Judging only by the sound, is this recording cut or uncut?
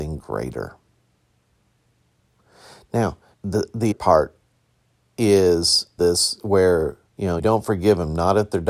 cut